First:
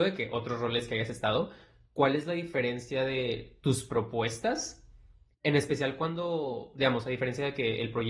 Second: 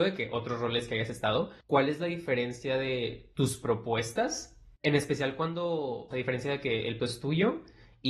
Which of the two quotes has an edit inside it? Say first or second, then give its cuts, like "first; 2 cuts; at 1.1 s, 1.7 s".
second; 4 cuts; at 1.6 s, 4.8 s, 6.1 s, 7.0 s